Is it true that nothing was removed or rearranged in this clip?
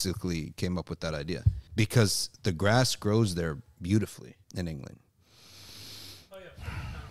no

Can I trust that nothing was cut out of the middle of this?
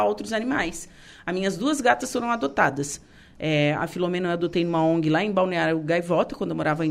yes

